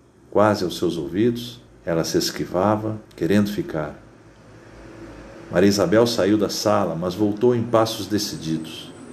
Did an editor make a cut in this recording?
yes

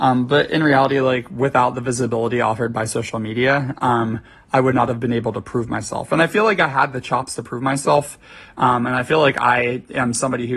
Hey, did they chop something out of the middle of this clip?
no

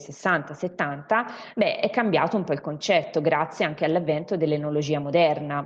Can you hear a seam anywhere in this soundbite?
no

